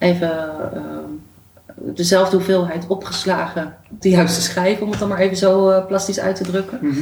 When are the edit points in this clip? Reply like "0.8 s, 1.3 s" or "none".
4.0 s